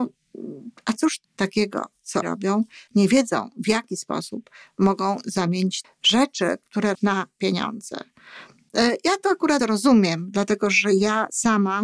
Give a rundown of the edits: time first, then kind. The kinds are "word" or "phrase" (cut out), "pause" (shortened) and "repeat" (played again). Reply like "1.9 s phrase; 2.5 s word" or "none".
1.2 s word; 2.2 s word; 2.9 s word; 5.8 s word; 6.9 s word; 9.6 s word